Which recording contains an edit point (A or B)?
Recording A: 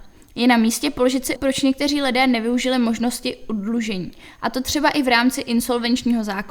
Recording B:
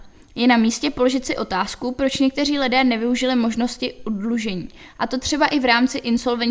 A